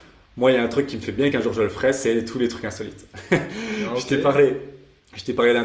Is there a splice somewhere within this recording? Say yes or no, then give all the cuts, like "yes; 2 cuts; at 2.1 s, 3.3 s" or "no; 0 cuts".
yes; 1 cut; at 1.3 s